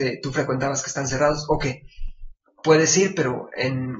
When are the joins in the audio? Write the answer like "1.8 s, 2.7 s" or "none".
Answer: none